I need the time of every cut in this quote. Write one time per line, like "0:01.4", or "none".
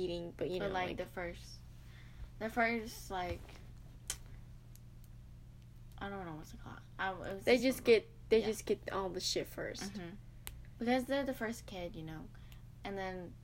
none